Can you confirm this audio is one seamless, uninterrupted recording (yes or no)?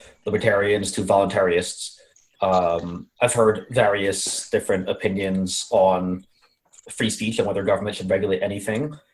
yes